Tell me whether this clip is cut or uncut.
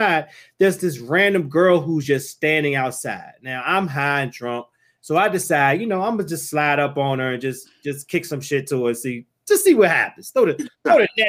uncut